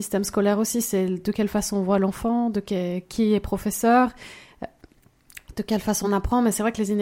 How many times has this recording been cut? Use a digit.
0